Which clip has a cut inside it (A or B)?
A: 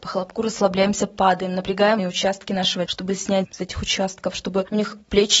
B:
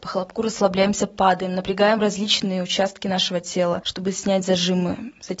A